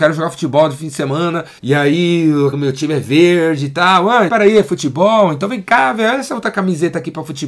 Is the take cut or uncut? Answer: cut